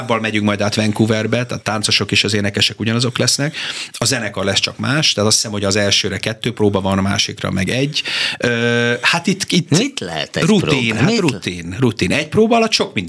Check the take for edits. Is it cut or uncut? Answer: uncut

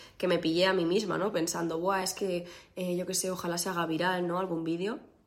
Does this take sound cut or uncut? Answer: uncut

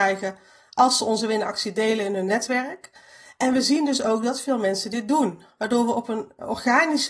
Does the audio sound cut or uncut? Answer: uncut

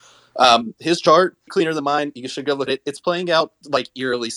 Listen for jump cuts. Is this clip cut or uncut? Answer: cut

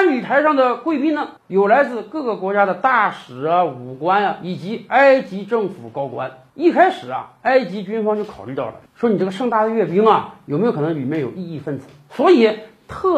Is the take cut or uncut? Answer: cut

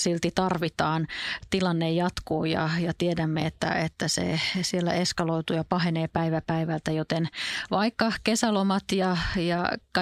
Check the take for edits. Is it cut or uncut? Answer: uncut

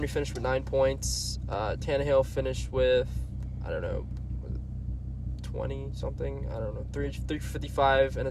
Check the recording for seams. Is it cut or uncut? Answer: uncut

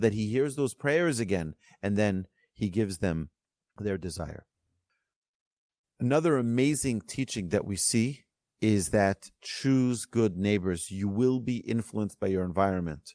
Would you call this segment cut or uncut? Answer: uncut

